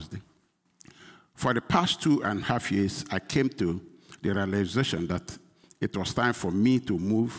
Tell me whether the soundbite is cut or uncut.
uncut